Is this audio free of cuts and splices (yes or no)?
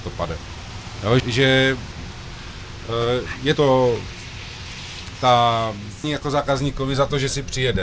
no